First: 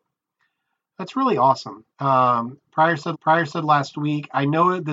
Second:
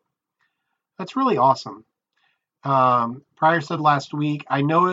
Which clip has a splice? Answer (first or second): first